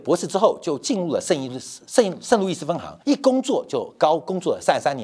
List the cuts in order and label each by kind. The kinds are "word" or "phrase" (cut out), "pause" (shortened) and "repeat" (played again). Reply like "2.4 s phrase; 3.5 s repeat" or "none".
3.0 s pause